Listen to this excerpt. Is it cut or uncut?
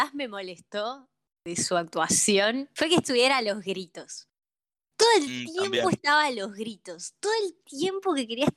uncut